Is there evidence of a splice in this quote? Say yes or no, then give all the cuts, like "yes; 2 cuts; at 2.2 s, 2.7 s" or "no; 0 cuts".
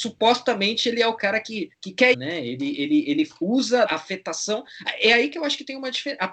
yes; 3 cuts; at 1.7 s, 2.1 s, 3.9 s